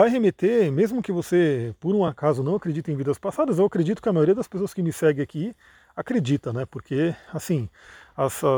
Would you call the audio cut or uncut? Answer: uncut